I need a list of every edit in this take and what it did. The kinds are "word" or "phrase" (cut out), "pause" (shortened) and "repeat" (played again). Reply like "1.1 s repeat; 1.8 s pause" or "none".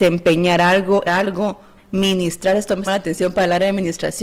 1.0 s word; 1.8 s word; 2.9 s word